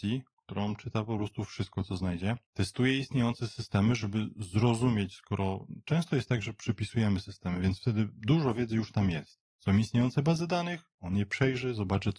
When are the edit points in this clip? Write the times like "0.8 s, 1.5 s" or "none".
2.5 s, 9.5 s